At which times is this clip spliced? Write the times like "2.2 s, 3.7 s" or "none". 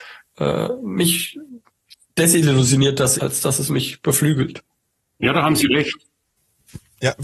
3.2 s